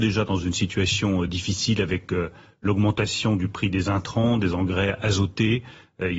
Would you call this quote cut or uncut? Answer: uncut